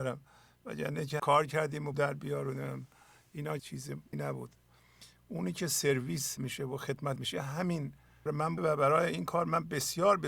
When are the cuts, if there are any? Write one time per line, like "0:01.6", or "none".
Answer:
0:01.2
0:01.9
0:03.6
0:04.1
0:06.4
0:07.2
0:08.3
0:08.6